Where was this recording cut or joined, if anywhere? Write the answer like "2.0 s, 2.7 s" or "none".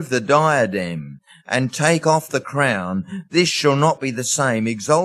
none